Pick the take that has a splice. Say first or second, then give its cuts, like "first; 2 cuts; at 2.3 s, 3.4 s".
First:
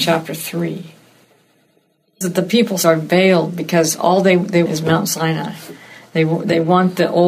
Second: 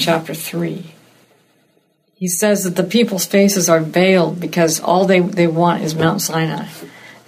first; 3 cuts; at 2.2 s, 2.8 s, 4.7 s